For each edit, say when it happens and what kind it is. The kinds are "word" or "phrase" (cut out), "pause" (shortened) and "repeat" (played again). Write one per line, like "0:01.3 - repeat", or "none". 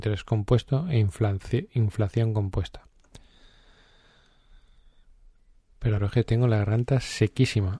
0:06.0 - phrase